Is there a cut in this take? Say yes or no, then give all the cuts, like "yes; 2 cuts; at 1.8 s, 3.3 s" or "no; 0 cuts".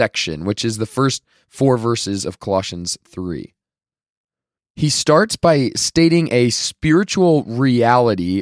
no; 0 cuts